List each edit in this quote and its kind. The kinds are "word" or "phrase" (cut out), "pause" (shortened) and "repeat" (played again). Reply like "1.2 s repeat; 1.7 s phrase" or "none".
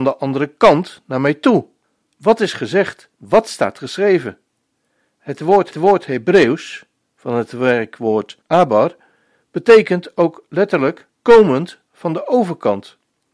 1.8 s pause; 3.1 s pause; 5.7 s repeat; 8.4 s pause; 11.1 s pause